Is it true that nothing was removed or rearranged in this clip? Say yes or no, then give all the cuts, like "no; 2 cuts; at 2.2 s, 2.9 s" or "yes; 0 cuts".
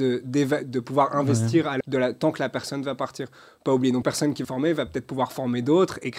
no; 3 cuts; at 1.8 s, 4.0 s, 4.4 s